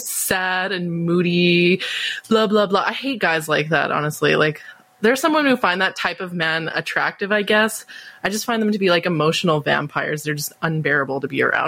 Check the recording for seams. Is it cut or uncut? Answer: uncut